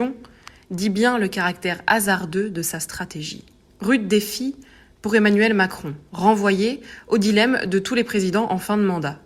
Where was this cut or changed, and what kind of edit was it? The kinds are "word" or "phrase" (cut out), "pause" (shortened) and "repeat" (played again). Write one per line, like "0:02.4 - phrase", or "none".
none